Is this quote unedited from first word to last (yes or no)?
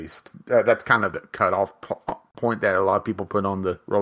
yes